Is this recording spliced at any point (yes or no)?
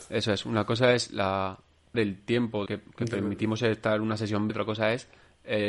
yes